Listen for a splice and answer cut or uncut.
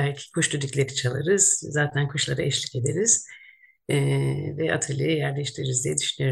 uncut